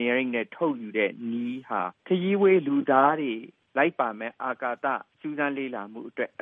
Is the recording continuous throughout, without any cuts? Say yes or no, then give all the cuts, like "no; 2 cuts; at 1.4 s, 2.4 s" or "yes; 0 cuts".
no; 1 cut; at 2.0 s